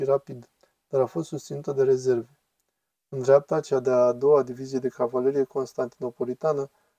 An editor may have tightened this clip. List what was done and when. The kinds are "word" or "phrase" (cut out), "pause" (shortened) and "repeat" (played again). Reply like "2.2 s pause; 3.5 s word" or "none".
none